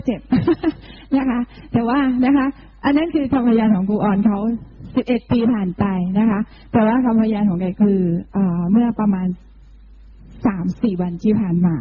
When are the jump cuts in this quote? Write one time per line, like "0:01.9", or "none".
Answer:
none